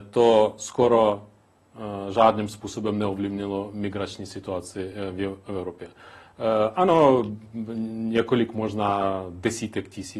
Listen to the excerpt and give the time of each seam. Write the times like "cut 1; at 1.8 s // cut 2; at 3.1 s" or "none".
none